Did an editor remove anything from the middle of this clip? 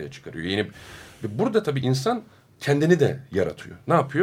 no; 0 cuts

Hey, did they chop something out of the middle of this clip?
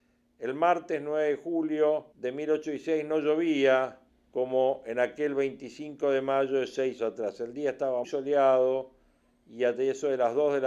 yes; 4 cuts; at 2.1 s, 4.1 s, 7.0 s, 8.0 s

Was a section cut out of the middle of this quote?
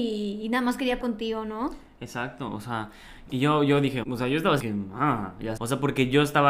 yes; 5 cuts; at 1.0 s, 3.3 s, 4.0 s, 4.6 s, 5.6 s

